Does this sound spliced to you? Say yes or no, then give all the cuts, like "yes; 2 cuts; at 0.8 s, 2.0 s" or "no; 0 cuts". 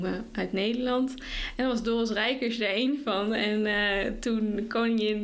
no; 0 cuts